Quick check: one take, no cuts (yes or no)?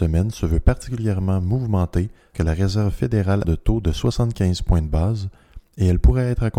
no